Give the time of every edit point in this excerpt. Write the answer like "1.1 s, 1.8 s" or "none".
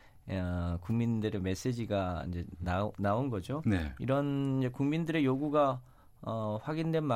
none